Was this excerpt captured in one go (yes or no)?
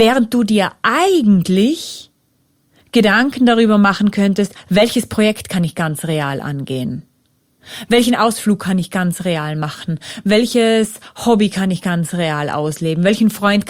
yes